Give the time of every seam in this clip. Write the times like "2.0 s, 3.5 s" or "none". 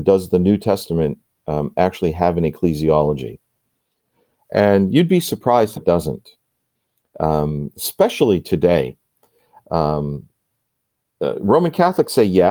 5.8 s